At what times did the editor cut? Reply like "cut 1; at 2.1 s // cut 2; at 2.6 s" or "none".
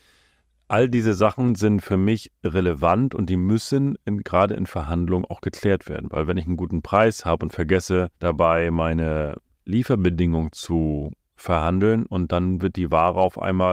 cut 1; at 8.1 s